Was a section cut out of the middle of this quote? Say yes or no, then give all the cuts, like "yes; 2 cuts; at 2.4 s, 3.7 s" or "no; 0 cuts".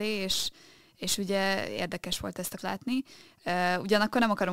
yes; 1 cut; at 2.6 s